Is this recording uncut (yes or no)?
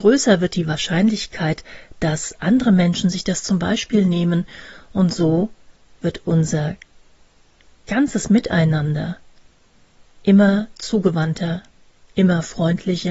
yes